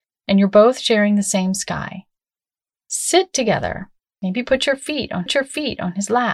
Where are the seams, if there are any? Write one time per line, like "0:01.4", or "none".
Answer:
0:04.0
0:05.3